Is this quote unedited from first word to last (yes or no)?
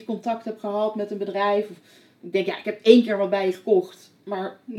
yes